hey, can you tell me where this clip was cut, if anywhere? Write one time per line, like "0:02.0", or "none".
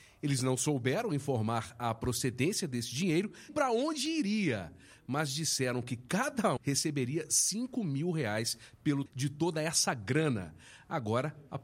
0:03.5
0:06.6
0:09.1